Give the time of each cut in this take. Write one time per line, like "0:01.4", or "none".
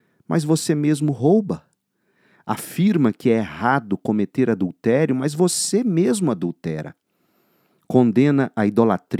none